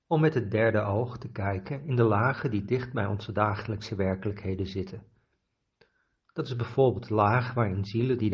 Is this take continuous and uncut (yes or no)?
yes